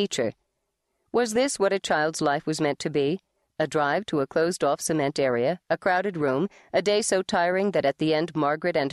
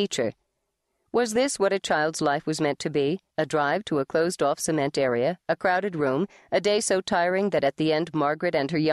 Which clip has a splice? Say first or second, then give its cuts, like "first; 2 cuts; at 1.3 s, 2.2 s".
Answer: second; 1 cut; at 3.3 s